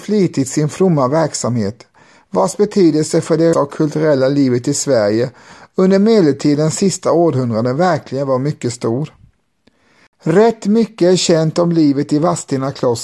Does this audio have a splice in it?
yes; 1 cut; at 3.5 s

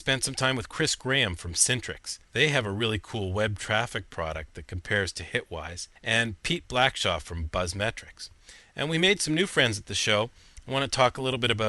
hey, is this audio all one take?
no; 2 cuts; at 2.2 s, 6.0 s

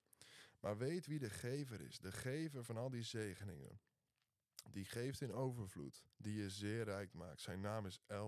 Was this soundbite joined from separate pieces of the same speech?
yes; 1 cut; at 6.1 s

